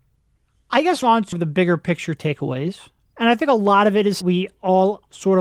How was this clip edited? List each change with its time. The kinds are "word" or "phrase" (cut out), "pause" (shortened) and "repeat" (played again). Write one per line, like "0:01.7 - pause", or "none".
0:01.0 - word
0:01.3 - word
0:04.2 - phrase